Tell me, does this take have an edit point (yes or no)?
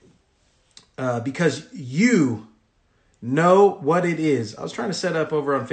no